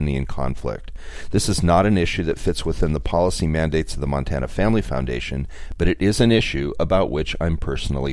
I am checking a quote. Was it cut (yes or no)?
no